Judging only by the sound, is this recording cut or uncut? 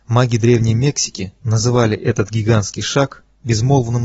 uncut